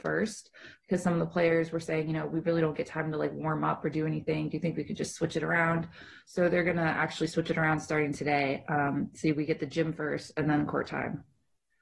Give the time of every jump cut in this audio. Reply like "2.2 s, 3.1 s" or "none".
none